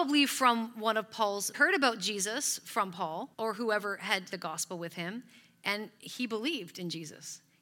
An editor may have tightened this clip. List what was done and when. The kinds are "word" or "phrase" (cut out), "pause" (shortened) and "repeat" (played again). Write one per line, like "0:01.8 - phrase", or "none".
0:01.5 - phrase
0:03.3 - pause
0:04.3 - word